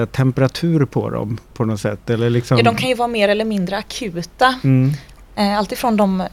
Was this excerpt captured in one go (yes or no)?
yes